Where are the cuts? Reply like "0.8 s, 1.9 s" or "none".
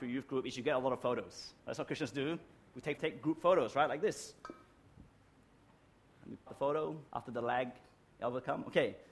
1.6 s, 3.0 s, 6.5 s, 7.1 s